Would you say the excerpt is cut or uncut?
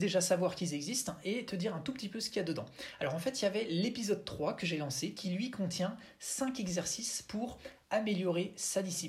uncut